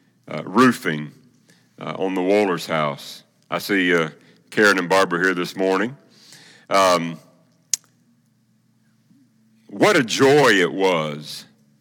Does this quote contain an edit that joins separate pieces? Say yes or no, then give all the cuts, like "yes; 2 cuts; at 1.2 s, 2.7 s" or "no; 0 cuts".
no; 0 cuts